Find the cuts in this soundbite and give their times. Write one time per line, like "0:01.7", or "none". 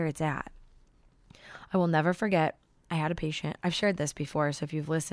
none